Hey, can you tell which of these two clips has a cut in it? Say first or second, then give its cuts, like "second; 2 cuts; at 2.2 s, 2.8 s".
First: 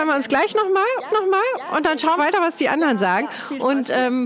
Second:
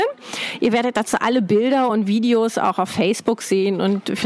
first; 2 cuts; at 1.1 s, 2.2 s